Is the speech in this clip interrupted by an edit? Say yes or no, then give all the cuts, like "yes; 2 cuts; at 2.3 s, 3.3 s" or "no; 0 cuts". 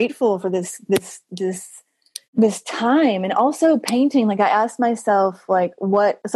yes; 1 cut; at 2.2 s